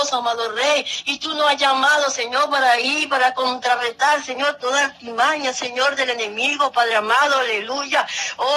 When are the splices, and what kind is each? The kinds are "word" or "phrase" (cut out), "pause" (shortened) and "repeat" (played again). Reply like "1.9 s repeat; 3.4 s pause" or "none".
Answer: none